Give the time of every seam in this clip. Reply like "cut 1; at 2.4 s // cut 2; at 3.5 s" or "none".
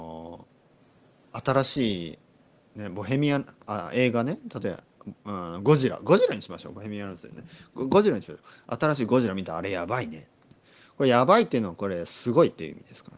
none